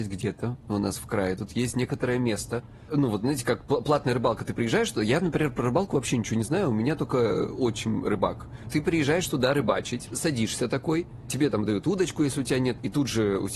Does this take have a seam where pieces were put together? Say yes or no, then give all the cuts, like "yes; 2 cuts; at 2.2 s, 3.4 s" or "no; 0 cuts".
no; 0 cuts